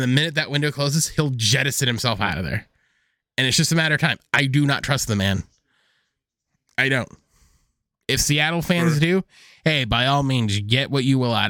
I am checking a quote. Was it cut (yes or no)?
no